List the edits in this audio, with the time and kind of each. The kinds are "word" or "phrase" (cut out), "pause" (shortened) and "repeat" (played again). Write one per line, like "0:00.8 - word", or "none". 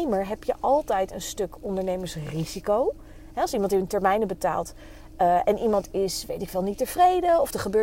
none